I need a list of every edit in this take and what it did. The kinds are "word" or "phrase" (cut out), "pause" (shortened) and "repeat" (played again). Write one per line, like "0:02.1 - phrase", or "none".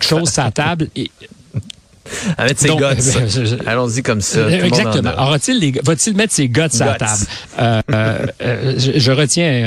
none